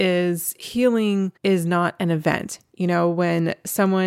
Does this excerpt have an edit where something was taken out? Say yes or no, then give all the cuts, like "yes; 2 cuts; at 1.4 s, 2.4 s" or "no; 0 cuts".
yes; 1 cut; at 1.4 s